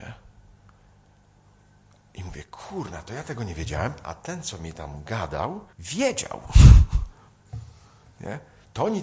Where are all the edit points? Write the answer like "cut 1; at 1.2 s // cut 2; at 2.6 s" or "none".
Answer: cut 1; at 5.7 s